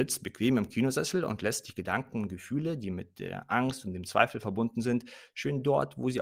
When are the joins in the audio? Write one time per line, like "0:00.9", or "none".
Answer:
none